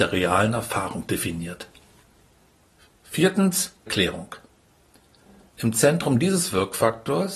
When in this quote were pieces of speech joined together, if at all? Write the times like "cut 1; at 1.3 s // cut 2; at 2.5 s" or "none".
cut 1; at 3.9 s